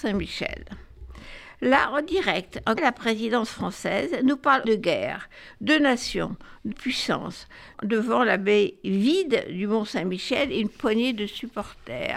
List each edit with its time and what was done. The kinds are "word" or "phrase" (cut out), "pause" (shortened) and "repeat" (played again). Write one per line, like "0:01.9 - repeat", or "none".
0:02.8 - word
0:04.6 - word
0:06.7 - word
0:07.7 - word